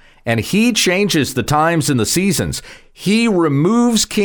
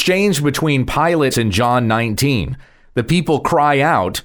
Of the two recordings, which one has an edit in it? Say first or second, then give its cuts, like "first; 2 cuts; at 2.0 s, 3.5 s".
second; 1 cut; at 1.3 s